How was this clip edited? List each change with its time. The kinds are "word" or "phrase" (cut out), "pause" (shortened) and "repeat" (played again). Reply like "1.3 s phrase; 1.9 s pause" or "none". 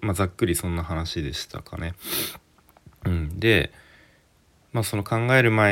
none